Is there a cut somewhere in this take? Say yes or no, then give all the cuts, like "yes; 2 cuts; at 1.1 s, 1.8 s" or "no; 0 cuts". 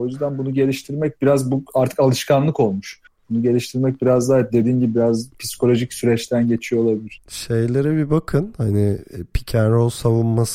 no; 0 cuts